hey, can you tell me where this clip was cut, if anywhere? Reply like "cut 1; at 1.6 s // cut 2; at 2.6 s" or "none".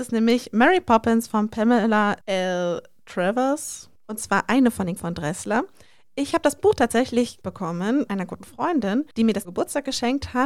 cut 1; at 2.2 s // cut 2; at 4.0 s // cut 3; at 5.0 s // cut 4; at 7.4 s // cut 5; at 8.1 s // cut 6; at 9.1 s // cut 7; at 9.4 s